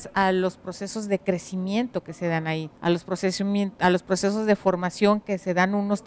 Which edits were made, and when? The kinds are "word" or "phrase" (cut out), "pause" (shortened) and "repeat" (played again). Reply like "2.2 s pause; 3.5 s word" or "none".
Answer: 2.8 s pause